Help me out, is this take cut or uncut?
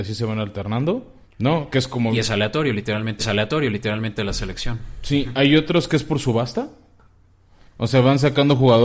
cut